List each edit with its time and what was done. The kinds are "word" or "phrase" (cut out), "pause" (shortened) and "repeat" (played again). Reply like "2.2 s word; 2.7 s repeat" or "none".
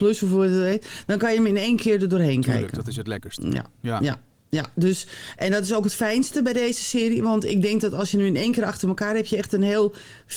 none